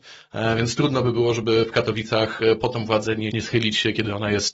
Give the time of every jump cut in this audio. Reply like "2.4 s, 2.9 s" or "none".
3.3 s